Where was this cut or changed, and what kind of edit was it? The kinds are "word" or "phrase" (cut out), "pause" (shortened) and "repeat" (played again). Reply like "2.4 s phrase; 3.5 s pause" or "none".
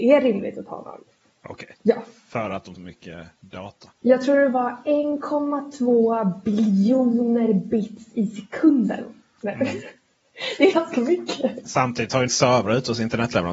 1.7 s pause; 2.8 s phrase; 3.9 s pause; 10.7 s word; 12.3 s word